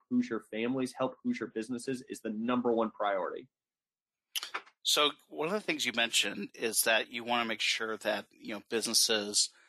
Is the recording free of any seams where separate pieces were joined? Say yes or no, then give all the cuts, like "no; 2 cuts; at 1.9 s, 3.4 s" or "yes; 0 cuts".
yes; 0 cuts